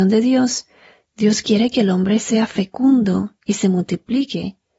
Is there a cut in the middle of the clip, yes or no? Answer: no